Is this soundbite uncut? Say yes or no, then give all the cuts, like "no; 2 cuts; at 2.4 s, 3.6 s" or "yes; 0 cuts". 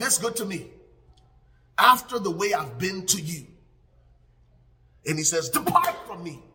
yes; 0 cuts